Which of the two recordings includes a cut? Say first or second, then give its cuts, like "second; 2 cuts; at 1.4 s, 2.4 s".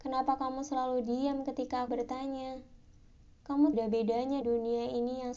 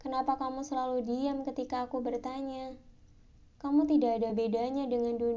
first; 3 cuts; at 1.9 s, 3.7 s, 4.4 s